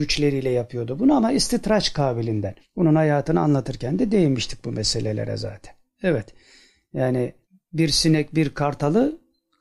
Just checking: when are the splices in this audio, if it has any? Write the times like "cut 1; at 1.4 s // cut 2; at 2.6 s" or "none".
cut 1; at 2.6 s // cut 2; at 7.4 s